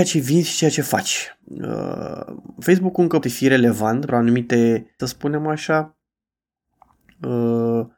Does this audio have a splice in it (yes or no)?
yes